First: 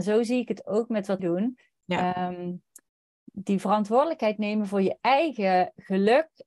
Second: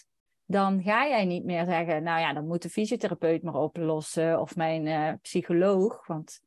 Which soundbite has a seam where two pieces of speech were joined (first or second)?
first